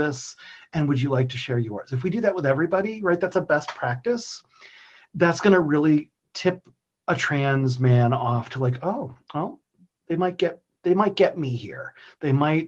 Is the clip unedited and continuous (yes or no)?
yes